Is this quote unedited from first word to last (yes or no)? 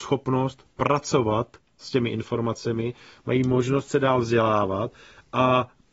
yes